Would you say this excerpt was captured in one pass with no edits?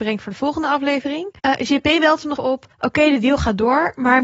no; 3 cuts; at 1.4 s, 2.4 s, 2.7 s

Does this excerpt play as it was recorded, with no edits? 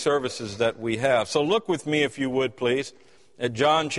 yes; 0 cuts

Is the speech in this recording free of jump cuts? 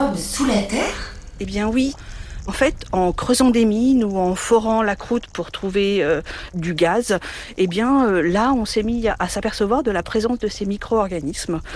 yes; 0 cuts

